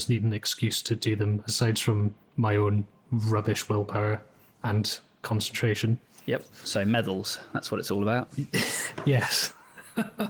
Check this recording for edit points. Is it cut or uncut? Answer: uncut